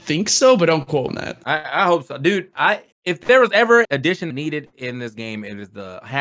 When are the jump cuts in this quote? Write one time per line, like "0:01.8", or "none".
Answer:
0:01.1
0:02.9
0:03.8
0:04.3